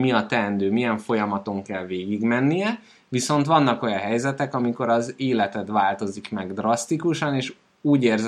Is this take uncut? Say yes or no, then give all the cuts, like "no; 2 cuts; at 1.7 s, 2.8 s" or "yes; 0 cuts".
yes; 0 cuts